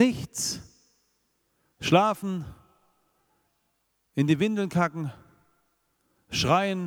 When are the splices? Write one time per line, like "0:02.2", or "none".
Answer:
none